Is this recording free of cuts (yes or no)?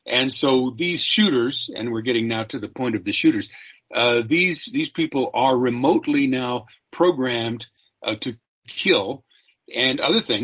yes